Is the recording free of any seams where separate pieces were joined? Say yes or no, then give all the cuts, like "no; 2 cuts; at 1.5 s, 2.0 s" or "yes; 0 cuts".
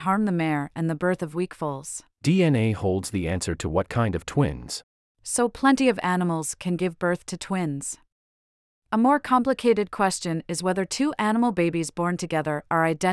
no; 1 cut; at 2.1 s